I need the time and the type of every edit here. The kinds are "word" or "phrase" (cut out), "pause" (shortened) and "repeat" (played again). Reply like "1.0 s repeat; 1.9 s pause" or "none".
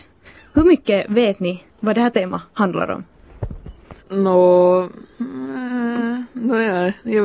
1.7 s pause; 4.0 s pause